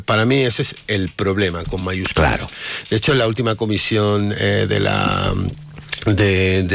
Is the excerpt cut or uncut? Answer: uncut